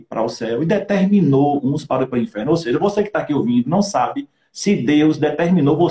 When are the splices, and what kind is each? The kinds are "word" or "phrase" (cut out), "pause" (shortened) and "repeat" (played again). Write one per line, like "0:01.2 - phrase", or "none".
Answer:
none